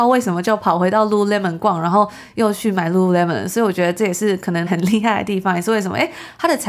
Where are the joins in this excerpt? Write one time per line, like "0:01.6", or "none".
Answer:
0:04.7